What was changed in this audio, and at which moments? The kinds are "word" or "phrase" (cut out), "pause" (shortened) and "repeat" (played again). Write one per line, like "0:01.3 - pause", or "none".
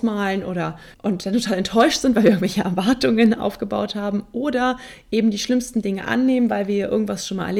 0:00.9 - word